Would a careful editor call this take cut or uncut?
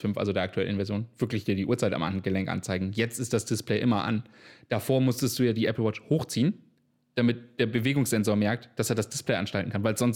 uncut